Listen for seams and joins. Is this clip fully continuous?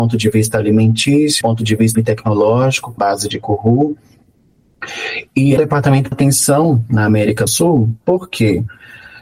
no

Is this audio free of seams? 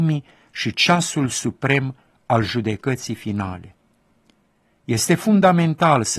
yes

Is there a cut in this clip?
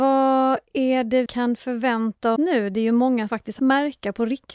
yes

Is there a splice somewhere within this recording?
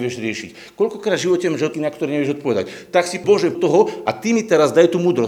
yes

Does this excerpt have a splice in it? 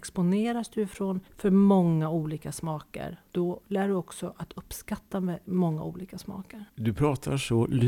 yes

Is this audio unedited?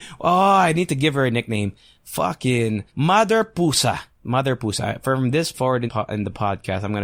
no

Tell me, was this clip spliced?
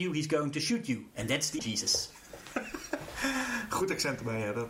yes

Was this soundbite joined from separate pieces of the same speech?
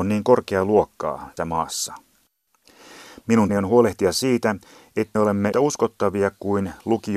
yes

